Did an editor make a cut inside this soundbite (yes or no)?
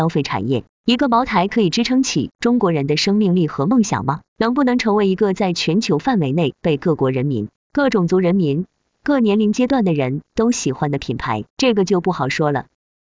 yes